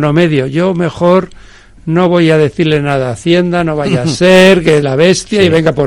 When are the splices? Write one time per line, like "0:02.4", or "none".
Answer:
0:04.8